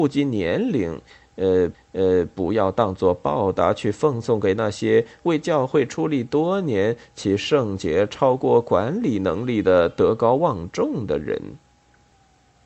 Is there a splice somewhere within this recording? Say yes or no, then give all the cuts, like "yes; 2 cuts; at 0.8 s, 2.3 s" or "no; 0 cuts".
yes; 1 cut; at 1.7 s